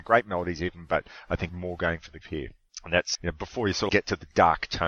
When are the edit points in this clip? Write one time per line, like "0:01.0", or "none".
0:01.5
0:02.2
0:03.1
0:03.9